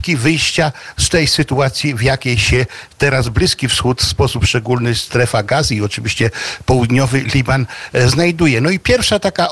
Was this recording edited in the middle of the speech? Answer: no; 0 cuts

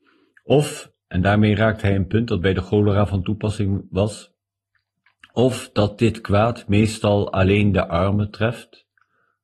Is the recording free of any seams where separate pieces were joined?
yes; 0 cuts

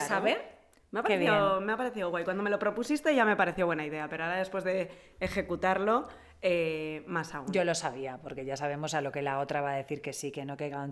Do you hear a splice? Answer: no; 0 cuts

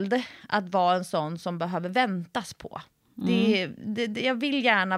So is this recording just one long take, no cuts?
yes; 0 cuts

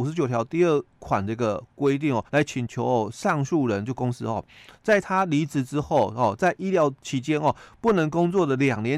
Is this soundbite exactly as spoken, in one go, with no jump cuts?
no; 1 cut; at 2.3 s

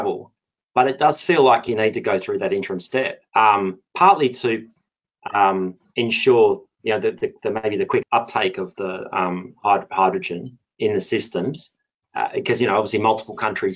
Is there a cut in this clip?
yes; 2 cuts; at 3.3 s, 8.0 s

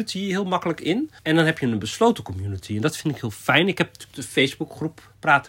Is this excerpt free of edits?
no; 1 cut; at 1.2 s

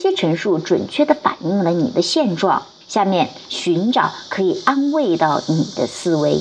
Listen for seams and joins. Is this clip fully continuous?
no; 1 cut; at 2.8 s

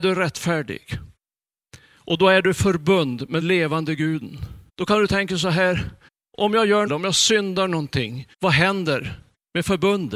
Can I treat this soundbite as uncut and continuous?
no; 5 cuts; at 3.4 s, 4.7 s, 6.1 s, 6.9 s, 8.3 s

